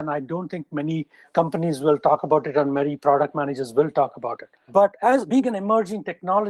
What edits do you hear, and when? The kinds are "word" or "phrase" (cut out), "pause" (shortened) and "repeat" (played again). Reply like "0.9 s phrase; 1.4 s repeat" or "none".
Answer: none